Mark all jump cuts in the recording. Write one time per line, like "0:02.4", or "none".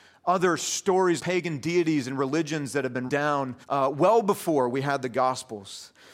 0:01.2
0:03.1
0:03.6